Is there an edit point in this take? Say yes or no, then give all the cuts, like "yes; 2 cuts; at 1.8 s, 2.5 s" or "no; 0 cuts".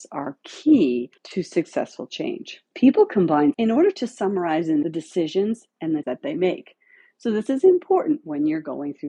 yes; 5 cuts; at 1.2 s, 2.7 s, 3.5 s, 4.8 s, 6.0 s